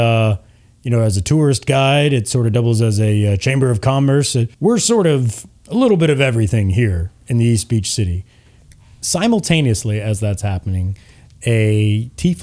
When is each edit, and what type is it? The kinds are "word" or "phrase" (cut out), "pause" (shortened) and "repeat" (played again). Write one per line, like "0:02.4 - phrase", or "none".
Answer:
0:04.5 - pause